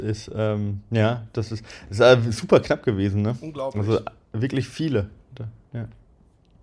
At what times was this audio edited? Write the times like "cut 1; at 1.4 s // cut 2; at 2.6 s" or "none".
none